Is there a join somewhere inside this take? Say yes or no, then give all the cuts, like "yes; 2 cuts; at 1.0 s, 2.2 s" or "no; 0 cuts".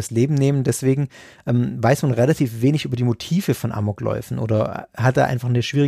no; 0 cuts